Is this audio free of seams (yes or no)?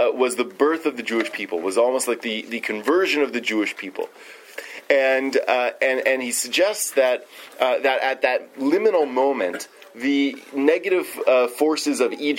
yes